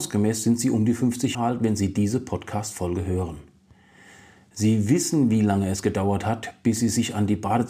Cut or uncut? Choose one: cut